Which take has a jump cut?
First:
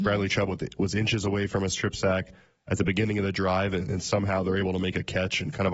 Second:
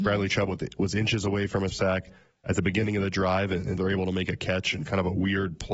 second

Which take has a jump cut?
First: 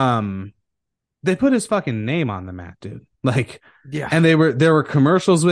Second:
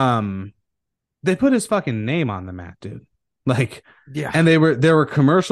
first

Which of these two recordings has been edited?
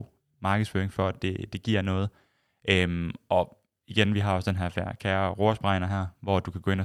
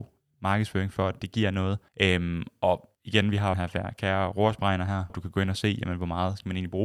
second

